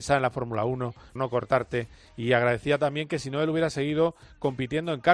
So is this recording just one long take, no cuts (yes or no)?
no